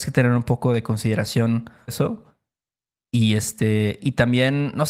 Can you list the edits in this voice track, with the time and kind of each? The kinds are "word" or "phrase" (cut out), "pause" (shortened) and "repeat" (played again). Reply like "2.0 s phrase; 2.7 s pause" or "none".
1.9 s word